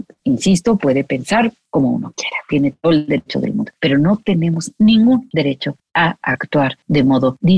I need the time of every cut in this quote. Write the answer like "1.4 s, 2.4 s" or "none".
none

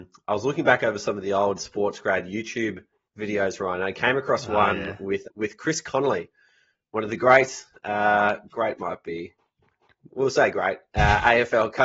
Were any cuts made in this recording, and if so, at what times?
5.2 s

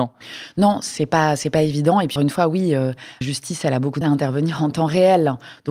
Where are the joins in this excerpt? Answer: 2.2 s, 3.2 s, 4.0 s

